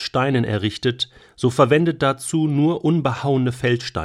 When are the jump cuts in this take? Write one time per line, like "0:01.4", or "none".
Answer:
none